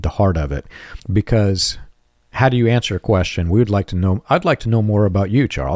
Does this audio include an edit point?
yes; 1 cut; at 1.0 s

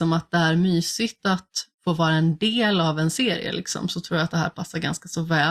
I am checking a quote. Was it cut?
yes; 1 cut; at 1.7 s

